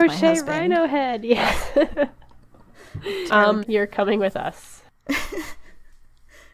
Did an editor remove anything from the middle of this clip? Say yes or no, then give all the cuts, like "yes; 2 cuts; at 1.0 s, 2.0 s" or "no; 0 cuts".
yes; 2 cuts; at 3.3 s, 3.6 s